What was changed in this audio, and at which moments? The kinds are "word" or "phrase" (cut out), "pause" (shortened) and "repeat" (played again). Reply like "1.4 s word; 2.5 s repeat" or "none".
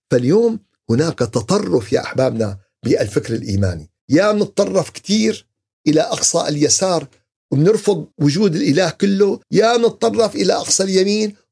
4.0 s pause; 8.1 s pause; 9.4 s pause